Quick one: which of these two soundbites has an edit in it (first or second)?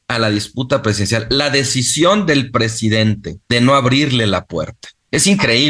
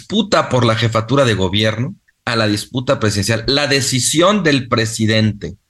first